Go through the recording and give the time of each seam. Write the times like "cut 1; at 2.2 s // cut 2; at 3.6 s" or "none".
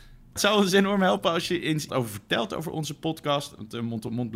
cut 1; at 1.9 s